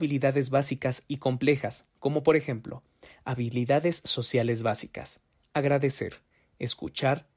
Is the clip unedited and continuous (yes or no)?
yes